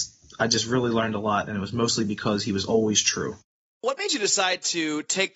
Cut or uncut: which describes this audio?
uncut